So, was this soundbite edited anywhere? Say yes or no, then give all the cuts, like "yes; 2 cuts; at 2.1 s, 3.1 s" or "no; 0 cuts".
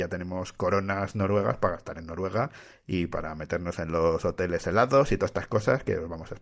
no; 0 cuts